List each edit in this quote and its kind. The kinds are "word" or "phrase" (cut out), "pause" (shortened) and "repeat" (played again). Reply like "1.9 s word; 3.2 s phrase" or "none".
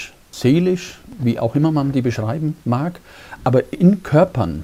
2.6 s pause